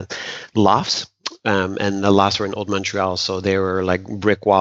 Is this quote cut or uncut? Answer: uncut